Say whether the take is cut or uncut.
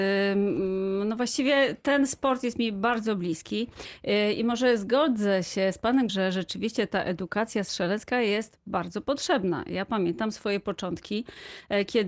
cut